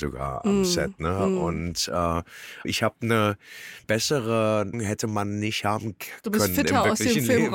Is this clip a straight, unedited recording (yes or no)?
no